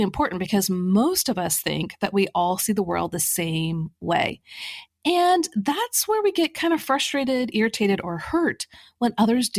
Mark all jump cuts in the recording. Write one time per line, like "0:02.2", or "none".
none